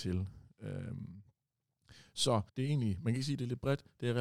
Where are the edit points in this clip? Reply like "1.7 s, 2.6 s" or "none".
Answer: 2.5 s